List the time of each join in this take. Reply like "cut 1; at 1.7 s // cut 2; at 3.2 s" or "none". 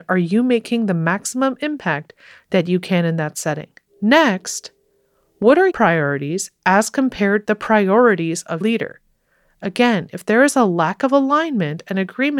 cut 1; at 5.7 s // cut 2; at 7.4 s // cut 3; at 8.6 s